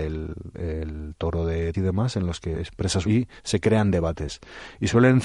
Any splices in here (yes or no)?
yes